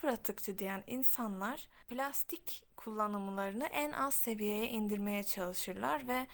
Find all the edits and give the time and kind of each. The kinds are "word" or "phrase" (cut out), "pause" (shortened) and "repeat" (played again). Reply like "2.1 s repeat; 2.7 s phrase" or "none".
none